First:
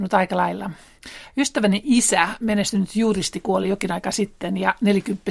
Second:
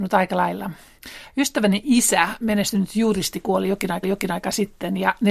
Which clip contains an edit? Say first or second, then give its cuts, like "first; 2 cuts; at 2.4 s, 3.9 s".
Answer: second; 1 cut; at 4.0 s